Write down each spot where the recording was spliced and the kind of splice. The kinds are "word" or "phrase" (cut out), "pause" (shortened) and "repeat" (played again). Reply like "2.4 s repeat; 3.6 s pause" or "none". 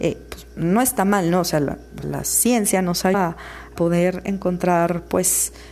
2.0 s word; 3.1 s word; 3.8 s word